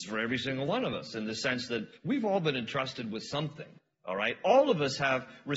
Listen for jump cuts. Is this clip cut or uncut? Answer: cut